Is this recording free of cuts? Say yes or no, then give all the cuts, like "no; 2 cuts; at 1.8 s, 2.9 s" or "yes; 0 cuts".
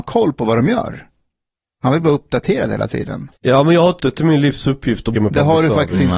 no; 3 cuts; at 3.4 s, 4.0 s, 5.1 s